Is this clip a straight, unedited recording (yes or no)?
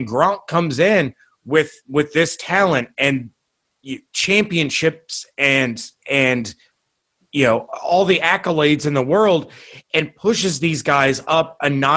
no